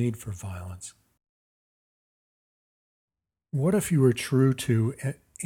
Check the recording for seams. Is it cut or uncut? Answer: uncut